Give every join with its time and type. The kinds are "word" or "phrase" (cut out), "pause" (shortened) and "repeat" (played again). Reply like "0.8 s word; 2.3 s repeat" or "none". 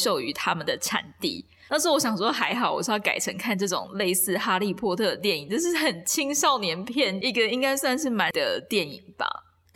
8.3 s word